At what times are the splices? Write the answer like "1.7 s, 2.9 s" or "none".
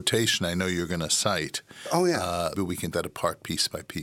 2.5 s, 2.9 s